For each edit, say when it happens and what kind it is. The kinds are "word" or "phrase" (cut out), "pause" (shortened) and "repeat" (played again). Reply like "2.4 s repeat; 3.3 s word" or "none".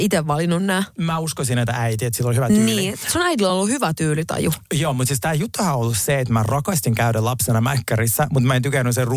none